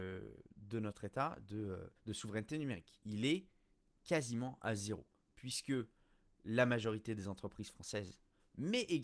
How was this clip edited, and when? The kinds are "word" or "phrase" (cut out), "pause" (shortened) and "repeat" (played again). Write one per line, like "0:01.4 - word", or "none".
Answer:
0:02.0 - pause